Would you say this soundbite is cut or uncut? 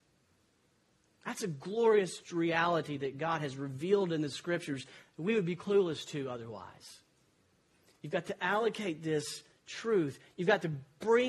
uncut